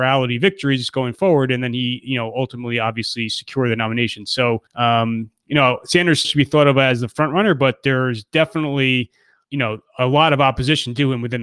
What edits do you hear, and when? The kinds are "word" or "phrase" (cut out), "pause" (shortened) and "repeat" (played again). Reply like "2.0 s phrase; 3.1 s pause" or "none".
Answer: 4.7 s pause; 6.2 s word; 9.4 s word